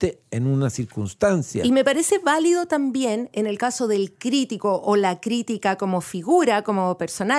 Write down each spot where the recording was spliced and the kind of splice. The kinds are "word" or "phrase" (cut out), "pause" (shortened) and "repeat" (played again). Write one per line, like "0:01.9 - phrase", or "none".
none

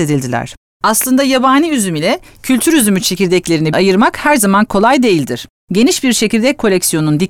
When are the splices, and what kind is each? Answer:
0:03.7 - word

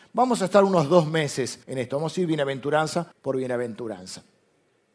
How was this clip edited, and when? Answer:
0:01.6 - pause
0:03.1 - pause

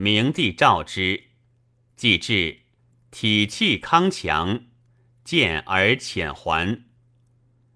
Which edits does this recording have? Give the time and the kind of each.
0:02.8 - pause

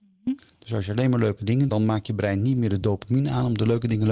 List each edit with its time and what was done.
0:01.7 - phrase

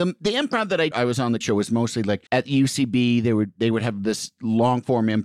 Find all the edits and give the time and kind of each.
0:00.9 - phrase
0:01.4 - word
0:02.3 - pause

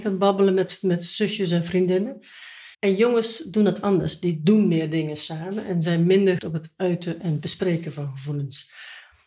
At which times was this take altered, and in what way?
0:02.7 - pause
0:06.4 - word

